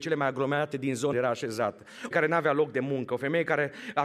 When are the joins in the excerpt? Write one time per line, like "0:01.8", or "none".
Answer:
0:01.1
0:02.1